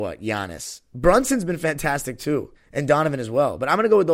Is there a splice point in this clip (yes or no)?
yes